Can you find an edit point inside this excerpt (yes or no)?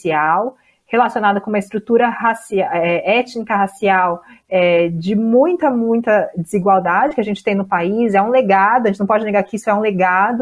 no